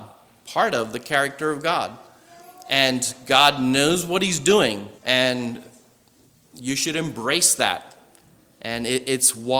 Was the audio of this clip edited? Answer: yes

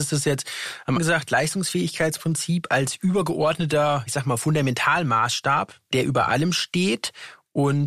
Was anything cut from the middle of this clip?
yes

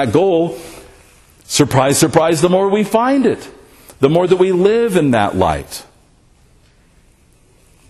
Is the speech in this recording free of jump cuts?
yes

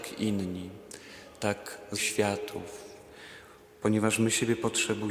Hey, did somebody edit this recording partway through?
yes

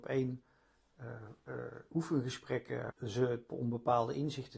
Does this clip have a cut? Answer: yes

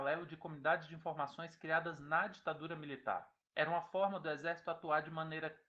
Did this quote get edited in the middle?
yes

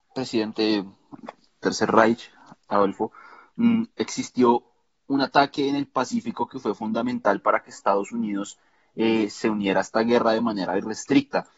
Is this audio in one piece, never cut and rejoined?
yes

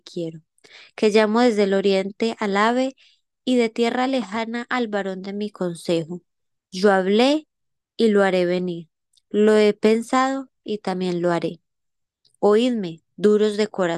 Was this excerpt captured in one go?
yes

